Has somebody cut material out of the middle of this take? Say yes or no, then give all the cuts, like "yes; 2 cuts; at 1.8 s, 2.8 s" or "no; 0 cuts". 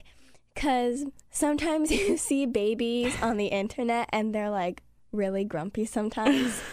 no; 0 cuts